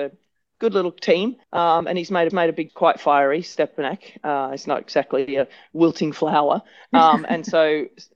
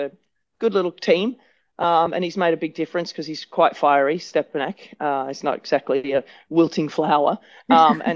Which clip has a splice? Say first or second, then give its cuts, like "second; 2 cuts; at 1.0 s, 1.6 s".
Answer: first; 3 cuts; at 1.4 s, 2.3 s, 2.7 s